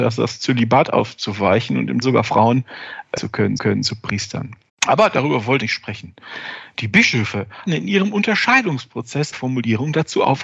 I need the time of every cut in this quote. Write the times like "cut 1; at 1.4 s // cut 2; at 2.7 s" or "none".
cut 1; at 2.0 s // cut 2; at 3.2 s // cut 3; at 3.6 s // cut 4; at 4.7 s // cut 5; at 5.6 s // cut 6; at 7.7 s // cut 7; at 9.3 s